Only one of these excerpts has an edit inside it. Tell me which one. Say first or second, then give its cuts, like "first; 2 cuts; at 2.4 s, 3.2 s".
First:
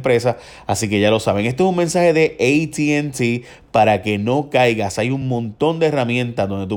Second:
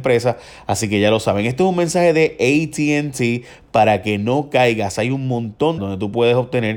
second; 1 cut; at 5.8 s